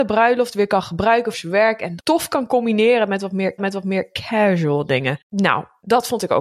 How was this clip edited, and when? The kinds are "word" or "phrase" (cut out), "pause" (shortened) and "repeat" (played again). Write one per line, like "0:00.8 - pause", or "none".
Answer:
0:01.3 - word
0:02.0 - word
0:03.6 - repeat
0:05.2 - pause

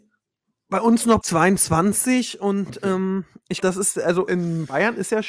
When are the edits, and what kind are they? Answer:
0:01.2 - word
0:03.6 - word
0:04.3 - word

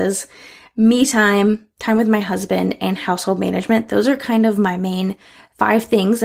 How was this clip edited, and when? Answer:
none

